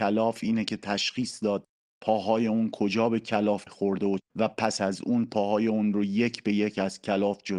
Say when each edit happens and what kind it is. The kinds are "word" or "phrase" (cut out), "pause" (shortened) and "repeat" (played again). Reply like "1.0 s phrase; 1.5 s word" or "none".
3.7 s word; 4.2 s word